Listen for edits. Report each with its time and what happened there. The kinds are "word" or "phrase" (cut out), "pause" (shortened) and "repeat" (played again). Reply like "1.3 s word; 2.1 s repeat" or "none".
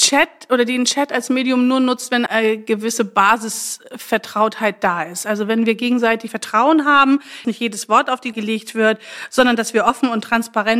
2.3 s word; 6.3 s word; 7.4 s word; 8.3 s word